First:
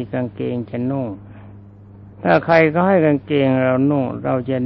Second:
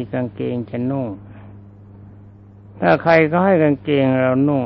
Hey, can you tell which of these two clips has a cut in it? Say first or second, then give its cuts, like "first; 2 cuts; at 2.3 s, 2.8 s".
first; 1 cut; at 2.1 s